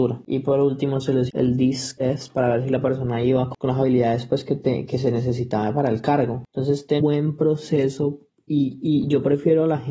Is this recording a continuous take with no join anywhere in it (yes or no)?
no